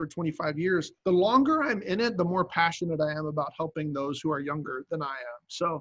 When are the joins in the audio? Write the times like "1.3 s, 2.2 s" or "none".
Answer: 1.0 s